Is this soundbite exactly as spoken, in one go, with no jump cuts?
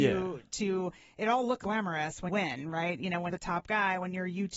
no; 3 cuts; at 1.6 s, 2.3 s, 3.3 s

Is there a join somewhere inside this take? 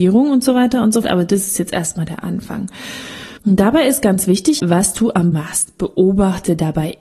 yes; 4 cuts; at 1.0 s, 3.4 s, 4.6 s, 5.3 s

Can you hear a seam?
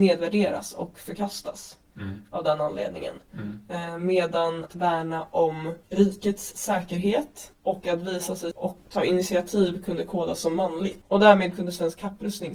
yes; 3 cuts; at 4.7 s, 5.8 s, 8.5 s

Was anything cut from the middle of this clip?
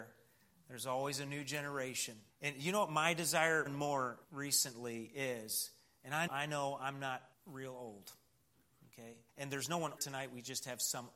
yes; 7 cuts; at 2.3 s, 3.7 s, 4.2 s, 6.3 s, 7.3 s, 9.3 s, 10.0 s

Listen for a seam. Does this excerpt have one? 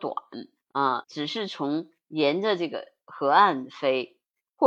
yes; 1 cut; at 1.0 s

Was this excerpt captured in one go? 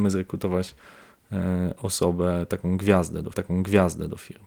no; 1 cut; at 3.3 s

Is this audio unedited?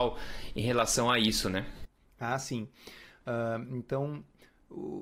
yes; 0 cuts

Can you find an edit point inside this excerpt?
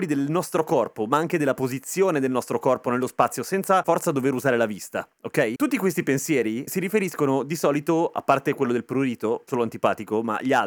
yes; 2 cuts; at 3.8 s, 9.5 s

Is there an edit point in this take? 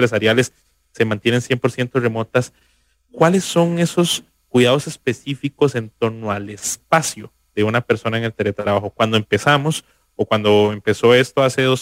no; 0 cuts

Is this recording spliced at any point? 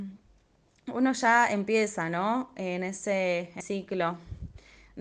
yes; 1 cut; at 3.6 s

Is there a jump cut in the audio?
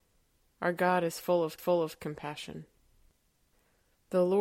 yes; 1 cut; at 1.6 s

